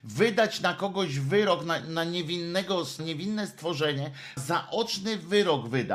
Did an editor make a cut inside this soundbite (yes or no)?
yes